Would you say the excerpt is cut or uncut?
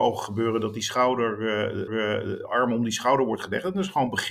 cut